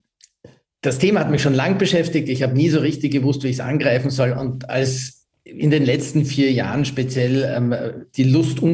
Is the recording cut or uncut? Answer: uncut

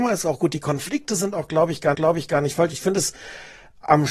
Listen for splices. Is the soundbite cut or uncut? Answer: cut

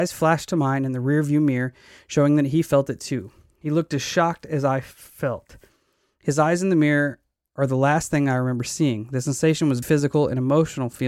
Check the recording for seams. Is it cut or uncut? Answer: cut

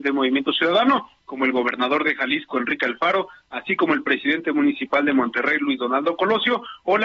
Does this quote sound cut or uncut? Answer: uncut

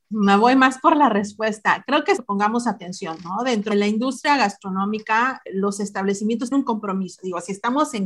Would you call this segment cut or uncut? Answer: cut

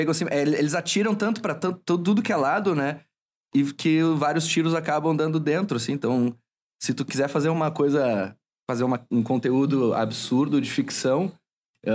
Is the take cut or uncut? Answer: uncut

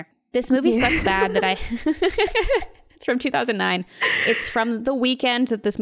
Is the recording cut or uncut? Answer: cut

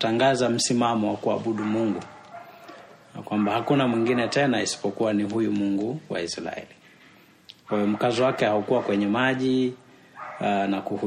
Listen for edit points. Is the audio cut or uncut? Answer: uncut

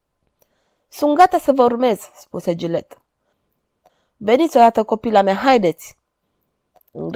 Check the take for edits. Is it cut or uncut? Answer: uncut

